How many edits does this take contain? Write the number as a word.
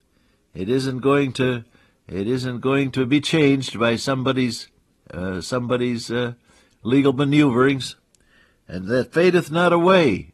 zero